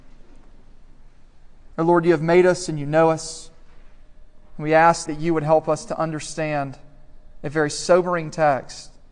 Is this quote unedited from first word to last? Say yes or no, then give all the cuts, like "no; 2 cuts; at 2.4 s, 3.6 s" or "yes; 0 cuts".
no; 2 cuts; at 1.7 s, 5.1 s